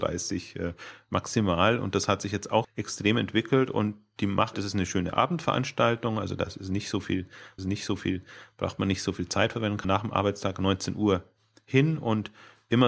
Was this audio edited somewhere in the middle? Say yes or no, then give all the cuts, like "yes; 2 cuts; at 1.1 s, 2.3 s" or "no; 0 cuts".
yes; 4 cuts; at 2.6 s, 4.5 s, 7.6 s, 9.8 s